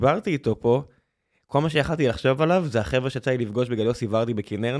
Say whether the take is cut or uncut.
uncut